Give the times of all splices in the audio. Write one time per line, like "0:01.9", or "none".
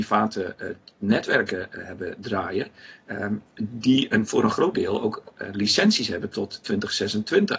none

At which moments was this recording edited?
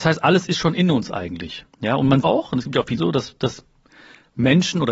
0:01.7
0:02.2
0:03.0

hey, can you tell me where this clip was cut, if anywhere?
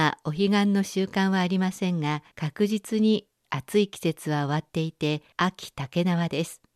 0:02.3
0:05.3

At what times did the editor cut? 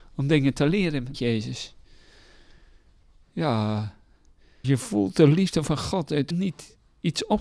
0:01.1
0:04.6
0:06.3

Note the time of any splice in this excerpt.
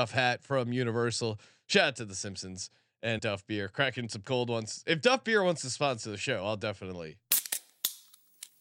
0:03.2

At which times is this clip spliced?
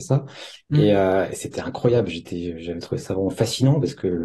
none

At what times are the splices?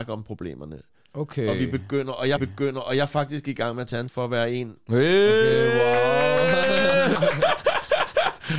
0:02.4
0:04.1

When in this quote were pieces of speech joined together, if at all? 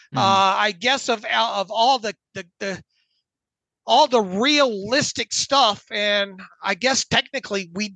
none

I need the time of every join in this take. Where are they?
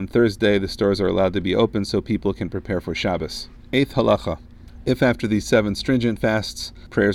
none

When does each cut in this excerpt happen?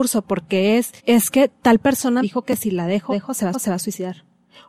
0:01.0
0:02.2
0:03.1
0:03.5

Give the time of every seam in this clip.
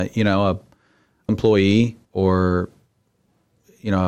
0:01.3
0:02.0

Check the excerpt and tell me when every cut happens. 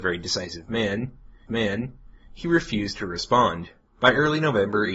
0:01.5
0:03.9

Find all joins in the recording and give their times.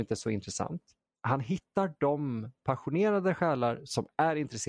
none

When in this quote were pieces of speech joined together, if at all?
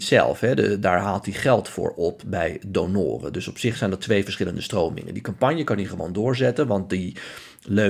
none

